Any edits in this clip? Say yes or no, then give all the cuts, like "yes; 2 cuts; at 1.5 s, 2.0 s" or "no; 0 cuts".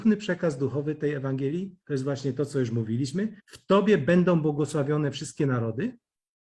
yes; 2 cuts; at 1.8 s, 3.4 s